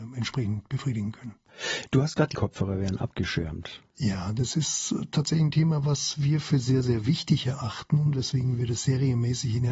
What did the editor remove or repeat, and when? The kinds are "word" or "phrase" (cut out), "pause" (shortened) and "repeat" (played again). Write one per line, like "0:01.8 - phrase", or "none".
0:02.3 - phrase